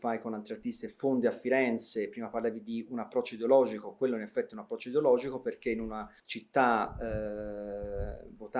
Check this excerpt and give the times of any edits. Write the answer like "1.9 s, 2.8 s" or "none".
6.2 s